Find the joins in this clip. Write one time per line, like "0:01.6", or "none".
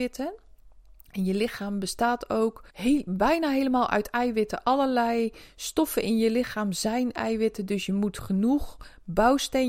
0:02.7